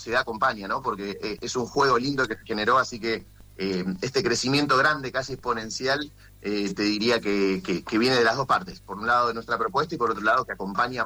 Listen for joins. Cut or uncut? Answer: cut